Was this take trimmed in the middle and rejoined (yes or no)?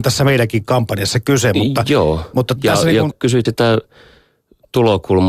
yes